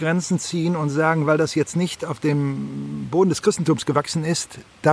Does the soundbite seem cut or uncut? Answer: uncut